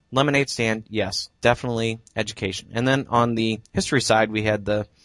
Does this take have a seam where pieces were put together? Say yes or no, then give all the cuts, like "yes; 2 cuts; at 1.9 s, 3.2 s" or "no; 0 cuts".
yes; 1 cut; at 3.6 s